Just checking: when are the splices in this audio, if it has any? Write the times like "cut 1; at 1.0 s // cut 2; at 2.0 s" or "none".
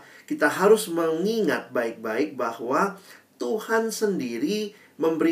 none